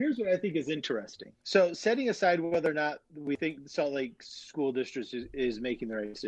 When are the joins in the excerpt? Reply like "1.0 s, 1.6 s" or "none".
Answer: 1.4 s